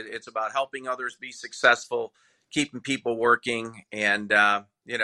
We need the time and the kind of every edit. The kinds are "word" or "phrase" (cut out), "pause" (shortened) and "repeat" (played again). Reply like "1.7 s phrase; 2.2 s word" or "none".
none